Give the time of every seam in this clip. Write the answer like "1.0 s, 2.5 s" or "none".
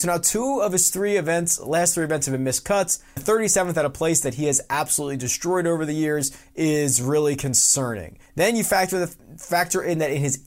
3.2 s, 8.3 s